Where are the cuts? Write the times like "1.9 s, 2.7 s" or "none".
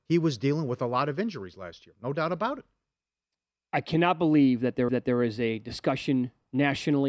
4.9 s